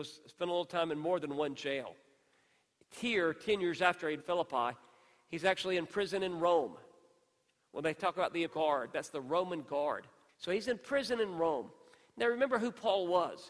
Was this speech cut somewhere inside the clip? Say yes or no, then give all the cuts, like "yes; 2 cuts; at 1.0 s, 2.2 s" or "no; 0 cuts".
yes; 3 cuts; at 4.2 s, 8.5 s, 10.3 s